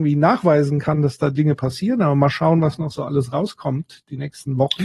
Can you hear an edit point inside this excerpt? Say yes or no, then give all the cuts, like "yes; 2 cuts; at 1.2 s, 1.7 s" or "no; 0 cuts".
no; 0 cuts